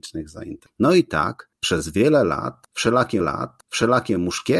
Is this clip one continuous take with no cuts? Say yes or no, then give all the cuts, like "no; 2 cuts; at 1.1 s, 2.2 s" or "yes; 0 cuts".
no; 1 cut; at 3.2 s